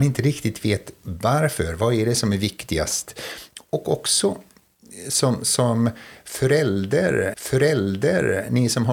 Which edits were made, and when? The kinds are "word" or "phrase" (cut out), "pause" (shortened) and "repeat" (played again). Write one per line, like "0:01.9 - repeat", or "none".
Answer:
0:07.3 - repeat